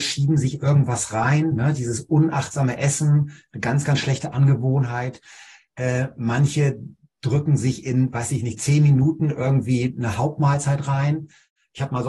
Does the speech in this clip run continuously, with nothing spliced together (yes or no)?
yes